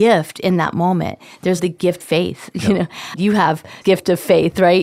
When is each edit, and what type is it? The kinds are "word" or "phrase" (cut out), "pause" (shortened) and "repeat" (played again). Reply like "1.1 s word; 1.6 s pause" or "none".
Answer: 1.6 s word; 2.0 s word; 3.2 s word; 3.8 s word

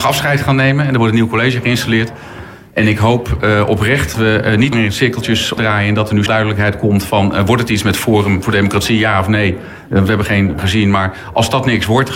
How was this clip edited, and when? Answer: 4.1 s word; 4.7 s phrase; 5.6 s phrase; 6.3 s word; 10.6 s word

